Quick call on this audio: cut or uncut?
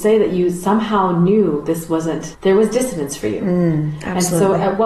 uncut